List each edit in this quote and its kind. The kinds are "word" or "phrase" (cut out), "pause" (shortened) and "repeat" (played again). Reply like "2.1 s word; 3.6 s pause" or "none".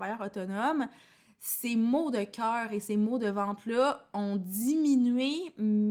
none